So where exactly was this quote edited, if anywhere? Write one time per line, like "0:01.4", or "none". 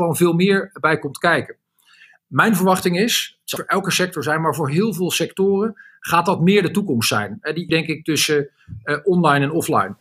0:03.6
0:07.7